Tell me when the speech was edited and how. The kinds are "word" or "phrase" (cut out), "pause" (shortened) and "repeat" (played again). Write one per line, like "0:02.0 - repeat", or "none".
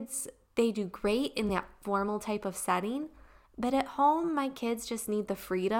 none